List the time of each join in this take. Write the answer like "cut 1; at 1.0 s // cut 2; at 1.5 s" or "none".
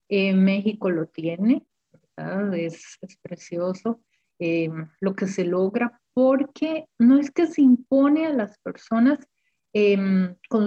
none